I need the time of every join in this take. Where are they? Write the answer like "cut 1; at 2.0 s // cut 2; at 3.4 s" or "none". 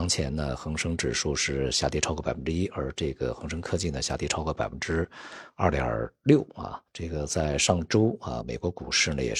cut 1; at 6.9 s